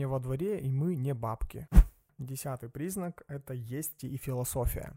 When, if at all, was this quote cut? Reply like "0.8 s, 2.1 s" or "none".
4.0 s